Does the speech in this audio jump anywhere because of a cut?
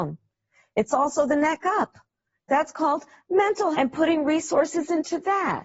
yes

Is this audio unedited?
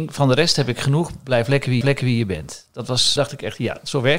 no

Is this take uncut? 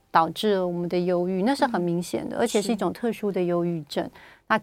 yes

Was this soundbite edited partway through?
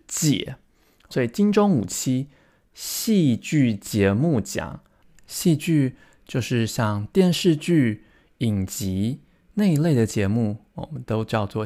yes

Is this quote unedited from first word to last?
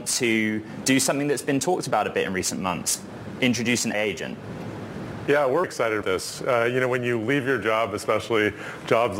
no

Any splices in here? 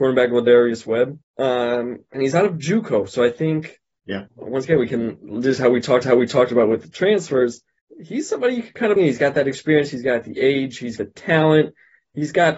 yes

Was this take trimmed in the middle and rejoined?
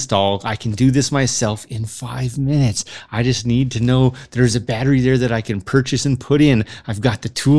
no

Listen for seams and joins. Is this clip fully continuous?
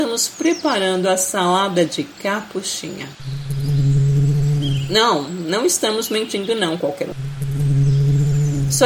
yes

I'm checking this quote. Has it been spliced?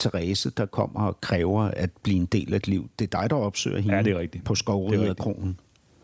yes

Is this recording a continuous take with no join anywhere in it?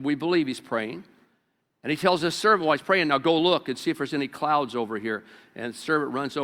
yes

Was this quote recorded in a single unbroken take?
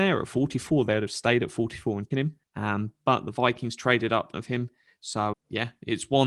no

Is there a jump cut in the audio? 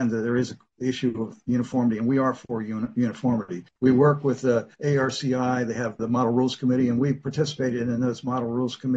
yes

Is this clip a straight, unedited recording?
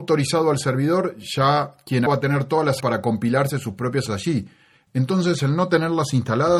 no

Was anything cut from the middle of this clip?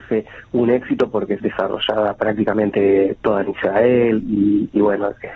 yes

